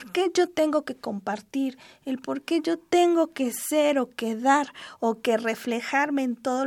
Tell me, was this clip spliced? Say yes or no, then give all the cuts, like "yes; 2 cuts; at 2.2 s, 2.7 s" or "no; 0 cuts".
no; 0 cuts